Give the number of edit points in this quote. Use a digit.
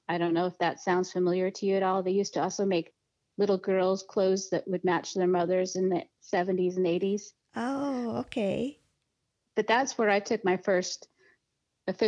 0